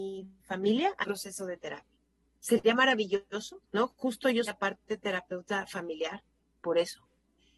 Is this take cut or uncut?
cut